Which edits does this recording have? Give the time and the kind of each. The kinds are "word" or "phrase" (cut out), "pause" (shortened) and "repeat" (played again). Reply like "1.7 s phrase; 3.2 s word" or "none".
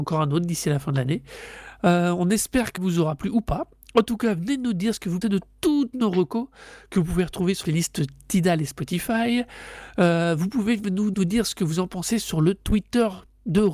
2.8 s word; 5.2 s word; 7.6 s word; 11.1 s word